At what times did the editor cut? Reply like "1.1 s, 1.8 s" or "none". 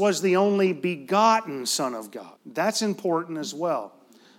2.4 s

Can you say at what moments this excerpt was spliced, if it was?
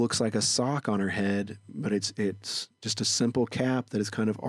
2.7 s

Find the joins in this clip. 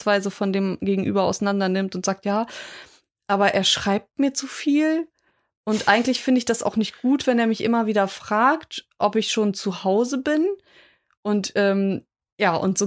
none

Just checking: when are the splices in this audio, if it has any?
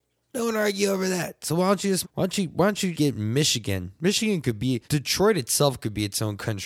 2.0 s, 2.9 s, 4.8 s

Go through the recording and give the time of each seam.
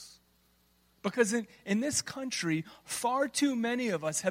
none

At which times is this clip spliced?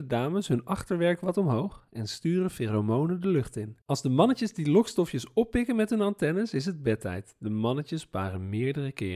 3.8 s

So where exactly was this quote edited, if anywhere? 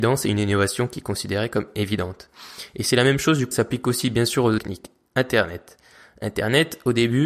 3.5 s, 4.6 s

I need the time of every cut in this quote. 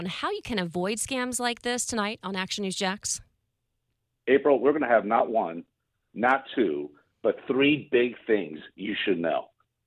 none

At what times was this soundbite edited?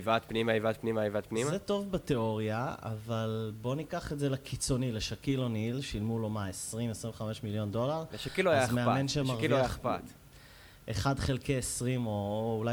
none

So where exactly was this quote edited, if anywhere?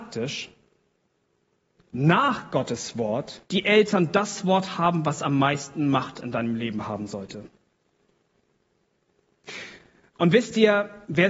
1.8 s, 3.4 s

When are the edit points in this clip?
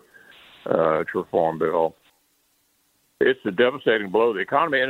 1.1 s, 3.4 s

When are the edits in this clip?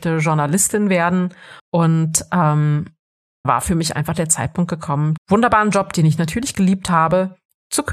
1.6 s, 3.4 s, 5.2 s

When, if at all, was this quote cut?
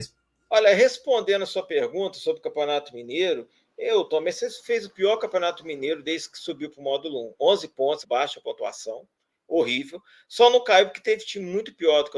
8.0 s

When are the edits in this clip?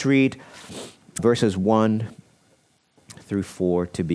1.2 s

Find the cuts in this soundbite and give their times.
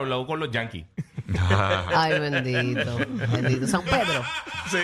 none

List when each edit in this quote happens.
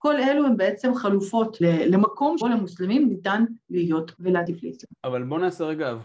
1.6 s, 2.4 s, 4.2 s

